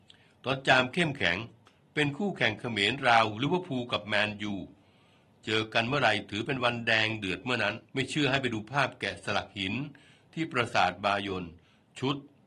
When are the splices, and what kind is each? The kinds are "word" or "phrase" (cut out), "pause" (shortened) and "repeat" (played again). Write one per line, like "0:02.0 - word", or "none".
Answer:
0:07.9 - pause